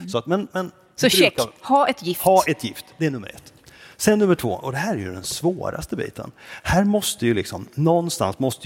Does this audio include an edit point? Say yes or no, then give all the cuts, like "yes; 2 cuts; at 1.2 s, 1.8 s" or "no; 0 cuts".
no; 0 cuts